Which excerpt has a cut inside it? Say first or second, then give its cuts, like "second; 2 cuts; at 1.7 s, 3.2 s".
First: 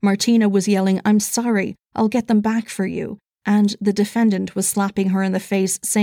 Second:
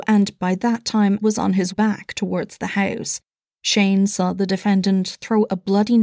second; 2 cuts; at 1.2 s, 1.7 s